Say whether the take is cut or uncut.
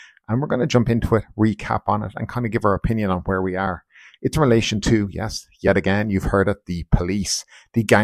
uncut